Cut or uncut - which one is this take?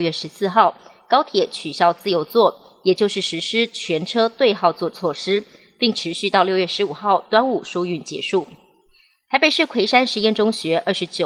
uncut